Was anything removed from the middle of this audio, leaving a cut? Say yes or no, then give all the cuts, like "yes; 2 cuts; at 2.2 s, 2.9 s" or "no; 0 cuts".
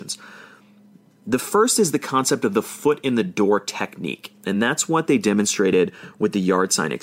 no; 0 cuts